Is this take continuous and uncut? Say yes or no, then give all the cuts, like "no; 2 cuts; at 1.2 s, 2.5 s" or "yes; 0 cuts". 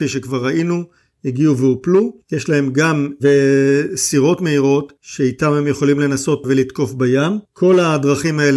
no; 1 cut; at 3.2 s